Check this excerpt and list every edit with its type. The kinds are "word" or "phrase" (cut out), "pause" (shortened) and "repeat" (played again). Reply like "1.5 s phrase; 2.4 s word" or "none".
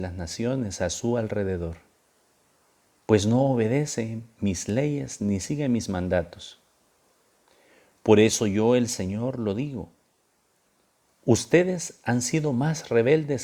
none

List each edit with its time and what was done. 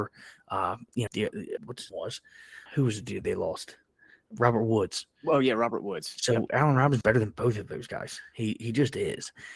1.1 s word; 1.6 s word; 1.9 s word; 2.7 s word; 7.0 s word

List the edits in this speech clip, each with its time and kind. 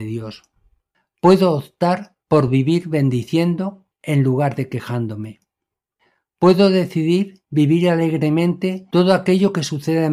none

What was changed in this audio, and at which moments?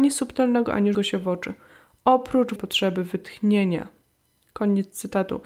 0.9 s word; 2.6 s word

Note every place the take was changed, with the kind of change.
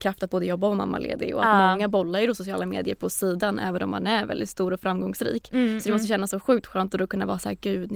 none

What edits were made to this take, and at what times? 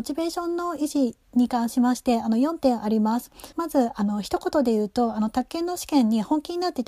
3.5 s pause

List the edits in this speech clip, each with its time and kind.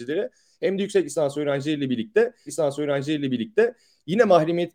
2.5 s repeat

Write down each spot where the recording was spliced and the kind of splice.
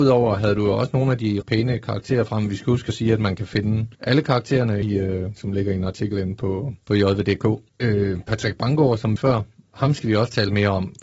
1.4 s word; 3.9 s pause; 4.8 s word; 5.4 s word; 6.8 s pause; 7.7 s pause; 9.2 s phrase

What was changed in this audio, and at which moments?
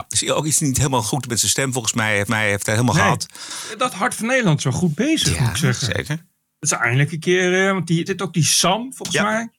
2.3 s repeat; 8.1 s word

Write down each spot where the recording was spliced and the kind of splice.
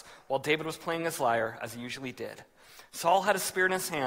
none

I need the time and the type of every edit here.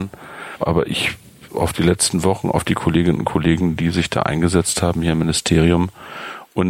1.5 s phrase

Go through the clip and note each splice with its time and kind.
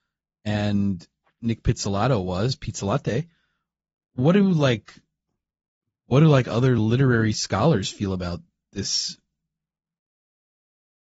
none

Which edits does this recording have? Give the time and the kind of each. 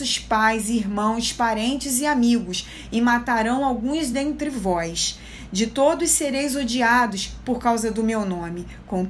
none

